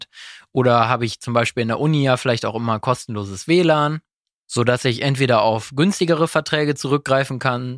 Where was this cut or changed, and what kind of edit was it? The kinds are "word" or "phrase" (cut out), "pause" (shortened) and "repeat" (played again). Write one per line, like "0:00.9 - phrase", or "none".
none